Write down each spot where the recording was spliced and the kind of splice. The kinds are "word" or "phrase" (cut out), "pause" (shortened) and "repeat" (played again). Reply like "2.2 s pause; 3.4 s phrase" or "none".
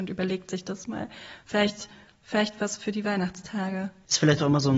none